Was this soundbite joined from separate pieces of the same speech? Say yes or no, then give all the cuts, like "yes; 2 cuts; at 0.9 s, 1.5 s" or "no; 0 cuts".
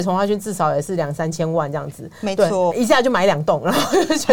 yes; 1 cut; at 2.7 s